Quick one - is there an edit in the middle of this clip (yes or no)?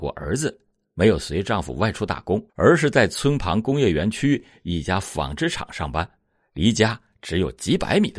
yes